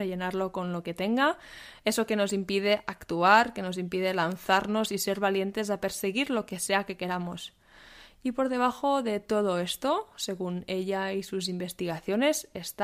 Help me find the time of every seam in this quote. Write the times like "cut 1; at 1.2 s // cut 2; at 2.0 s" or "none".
none